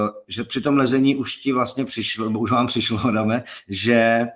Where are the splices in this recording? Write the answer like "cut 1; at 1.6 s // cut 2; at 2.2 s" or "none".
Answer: none